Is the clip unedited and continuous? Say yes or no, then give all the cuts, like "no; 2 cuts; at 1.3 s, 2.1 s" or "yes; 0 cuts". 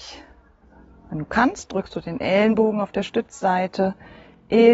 yes; 0 cuts